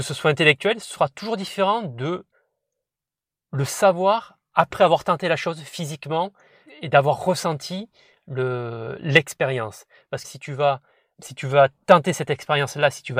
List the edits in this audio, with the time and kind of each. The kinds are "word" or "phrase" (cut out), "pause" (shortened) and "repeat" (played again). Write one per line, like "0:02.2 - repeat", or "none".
0:06.7 - word
0:10.2 - word